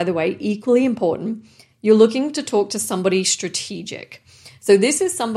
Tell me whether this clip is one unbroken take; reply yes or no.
yes